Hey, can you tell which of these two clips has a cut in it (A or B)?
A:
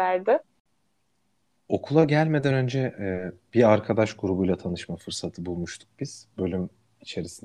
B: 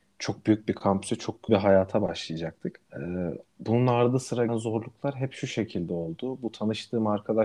B